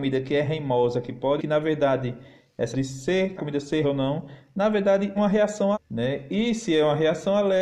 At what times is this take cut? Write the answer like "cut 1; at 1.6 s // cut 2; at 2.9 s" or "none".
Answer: cut 1; at 1.4 s // cut 2; at 2.7 s // cut 3; at 3.4 s // cut 4; at 3.8 s // cut 5; at 5.2 s // cut 6; at 5.7 s